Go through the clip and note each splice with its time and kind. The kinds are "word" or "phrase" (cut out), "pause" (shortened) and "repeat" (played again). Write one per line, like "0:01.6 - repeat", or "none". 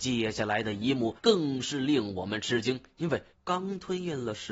0:01.2 - pause
0:03.3 - pause